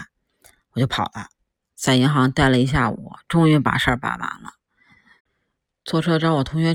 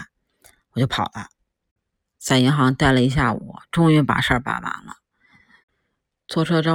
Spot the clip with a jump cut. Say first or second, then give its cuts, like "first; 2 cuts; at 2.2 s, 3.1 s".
first; 1 cut; at 1.6 s